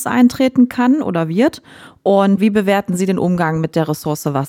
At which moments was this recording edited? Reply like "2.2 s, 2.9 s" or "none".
2.4 s